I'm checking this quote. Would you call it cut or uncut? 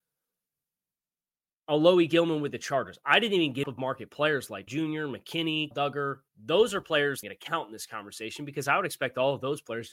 cut